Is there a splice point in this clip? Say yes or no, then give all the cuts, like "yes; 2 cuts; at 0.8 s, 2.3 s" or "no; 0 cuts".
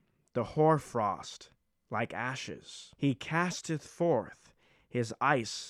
yes; 1 cut; at 2.9 s